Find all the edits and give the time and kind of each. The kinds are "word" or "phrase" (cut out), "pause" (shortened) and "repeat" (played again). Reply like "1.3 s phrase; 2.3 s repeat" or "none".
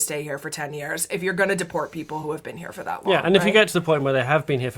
none

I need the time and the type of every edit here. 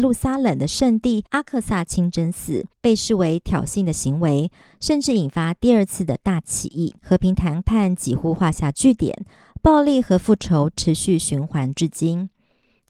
1.3 s pause; 2.7 s pause; 7.0 s pause

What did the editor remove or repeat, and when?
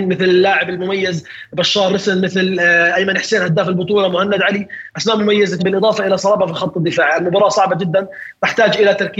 5.6 s word

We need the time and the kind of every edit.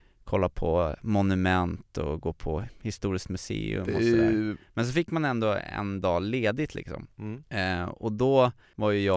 none

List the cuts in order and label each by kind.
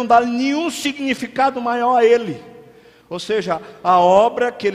none

